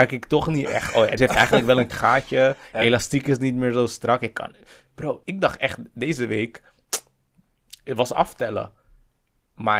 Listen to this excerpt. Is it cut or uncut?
cut